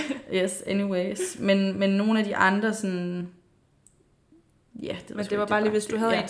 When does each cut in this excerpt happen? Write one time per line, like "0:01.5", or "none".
none